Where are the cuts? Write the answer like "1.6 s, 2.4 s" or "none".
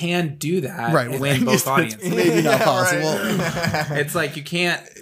1.2 s